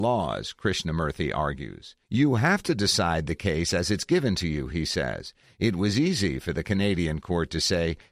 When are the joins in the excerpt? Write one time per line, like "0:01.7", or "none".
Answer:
0:02.0